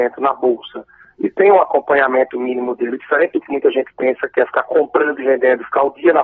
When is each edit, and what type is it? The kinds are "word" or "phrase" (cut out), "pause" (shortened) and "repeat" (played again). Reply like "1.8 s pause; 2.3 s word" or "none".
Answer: none